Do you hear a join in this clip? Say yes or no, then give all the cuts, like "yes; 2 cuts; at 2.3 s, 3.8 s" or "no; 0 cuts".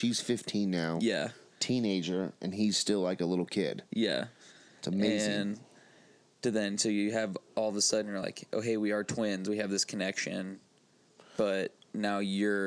no; 0 cuts